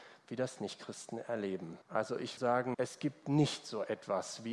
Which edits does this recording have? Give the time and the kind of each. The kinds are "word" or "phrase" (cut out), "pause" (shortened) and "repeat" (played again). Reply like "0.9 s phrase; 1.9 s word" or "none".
1.8 s pause; 2.4 s word; 2.7 s word